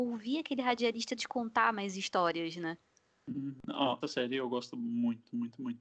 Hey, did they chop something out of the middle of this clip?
yes; 1 cut; at 4.0 s

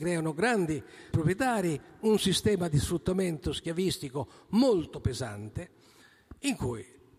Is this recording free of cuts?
no; 1 cut; at 1.1 s

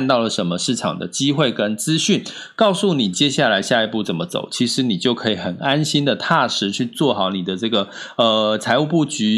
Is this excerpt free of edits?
yes; 0 cuts

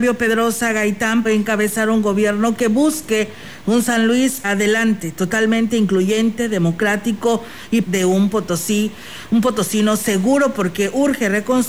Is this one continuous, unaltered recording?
no; 3 cuts; at 1.2 s, 4.4 s, 7.8 s

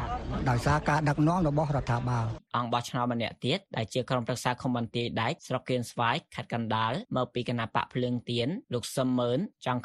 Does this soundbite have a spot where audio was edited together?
no; 0 cuts

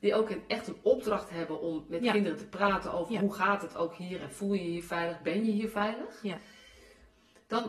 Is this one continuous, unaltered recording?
yes; 0 cuts

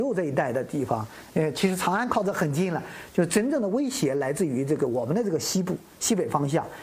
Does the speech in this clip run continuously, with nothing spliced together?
yes; 0 cuts

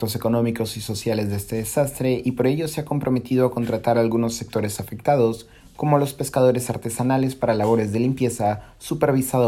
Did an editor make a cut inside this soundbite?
no; 0 cuts

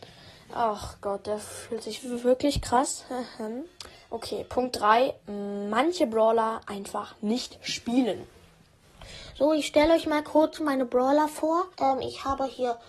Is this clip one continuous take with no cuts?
no; 2 cuts; at 4.0 s, 11.7 s

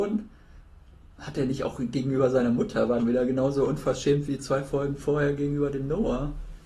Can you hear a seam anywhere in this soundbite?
yes; 1 cut; at 3.0 s

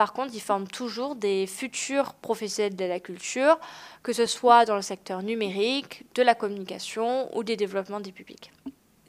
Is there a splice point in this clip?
no; 0 cuts

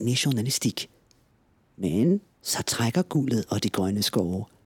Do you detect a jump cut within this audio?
no; 0 cuts

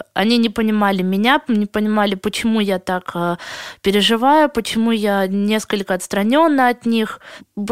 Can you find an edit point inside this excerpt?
no; 0 cuts

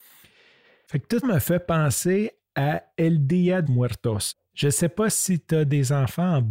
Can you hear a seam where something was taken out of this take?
yes; 2 cuts; at 1.2 s, 3.7 s

